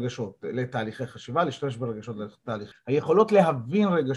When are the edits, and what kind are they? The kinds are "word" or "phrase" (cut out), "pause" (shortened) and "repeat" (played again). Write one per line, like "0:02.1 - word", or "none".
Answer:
0:02.7 - word